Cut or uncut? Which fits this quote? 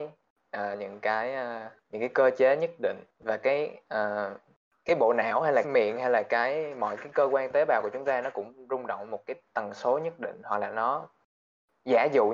cut